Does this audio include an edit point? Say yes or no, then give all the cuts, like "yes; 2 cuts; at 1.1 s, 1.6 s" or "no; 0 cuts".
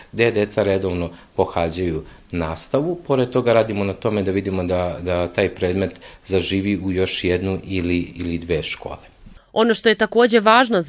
no; 0 cuts